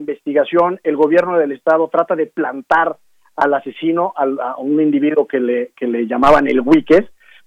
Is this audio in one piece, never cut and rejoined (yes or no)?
yes